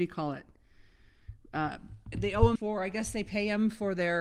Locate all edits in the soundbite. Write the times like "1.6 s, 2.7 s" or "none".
2.1 s, 2.6 s